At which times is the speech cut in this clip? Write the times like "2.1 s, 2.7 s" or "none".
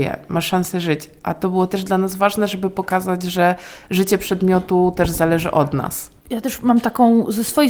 6.2 s

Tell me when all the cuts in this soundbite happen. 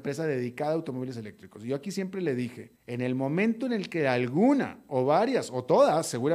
2.8 s

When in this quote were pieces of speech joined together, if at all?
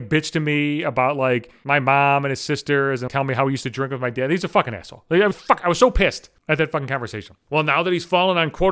3.1 s, 5.3 s

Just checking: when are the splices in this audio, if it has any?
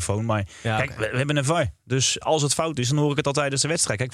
2.2 s

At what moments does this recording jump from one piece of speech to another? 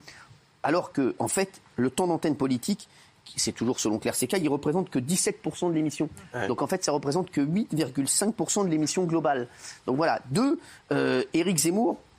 1.2 s

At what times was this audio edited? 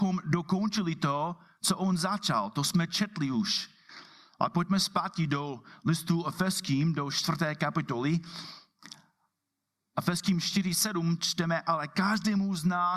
none

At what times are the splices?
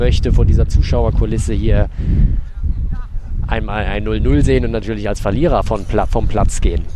none

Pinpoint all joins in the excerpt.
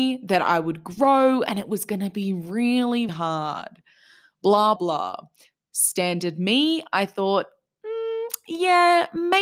3.1 s, 4.8 s

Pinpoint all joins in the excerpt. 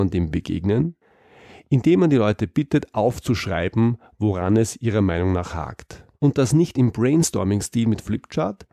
6.1 s

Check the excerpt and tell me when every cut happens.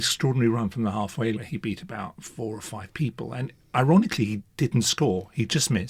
1.3 s

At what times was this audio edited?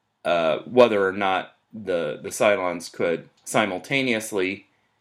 1.6 s, 3.4 s

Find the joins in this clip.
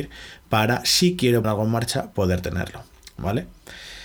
1.4 s

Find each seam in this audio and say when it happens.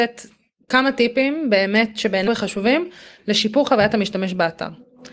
2.3 s

